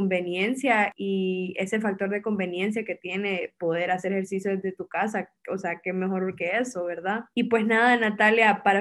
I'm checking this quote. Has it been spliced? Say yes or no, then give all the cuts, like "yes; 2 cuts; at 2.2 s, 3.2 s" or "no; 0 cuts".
no; 0 cuts